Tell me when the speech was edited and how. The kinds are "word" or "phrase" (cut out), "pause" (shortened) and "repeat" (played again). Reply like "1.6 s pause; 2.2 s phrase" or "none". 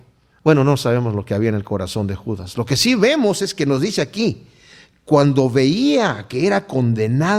none